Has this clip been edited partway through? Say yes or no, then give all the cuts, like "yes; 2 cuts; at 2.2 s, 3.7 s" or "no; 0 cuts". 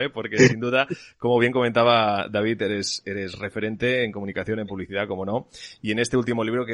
no; 0 cuts